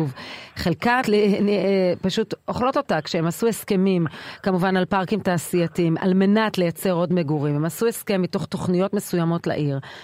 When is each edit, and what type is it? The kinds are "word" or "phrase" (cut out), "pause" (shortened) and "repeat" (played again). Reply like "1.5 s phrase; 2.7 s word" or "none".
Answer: 1.0 s word